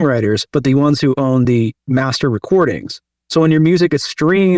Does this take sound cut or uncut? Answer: uncut